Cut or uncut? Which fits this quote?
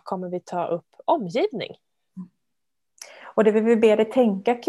uncut